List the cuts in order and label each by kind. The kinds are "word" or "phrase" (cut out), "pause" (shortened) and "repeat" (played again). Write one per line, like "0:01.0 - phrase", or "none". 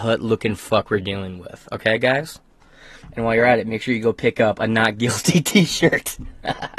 none

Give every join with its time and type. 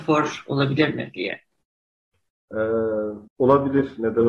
0:03.3 - pause

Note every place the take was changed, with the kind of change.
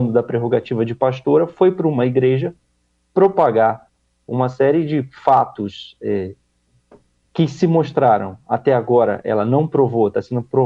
none

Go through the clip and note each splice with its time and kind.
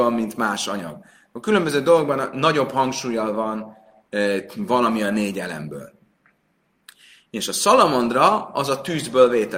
none

